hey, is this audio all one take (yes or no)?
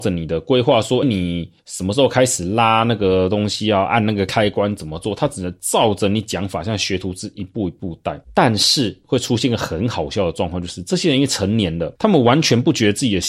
no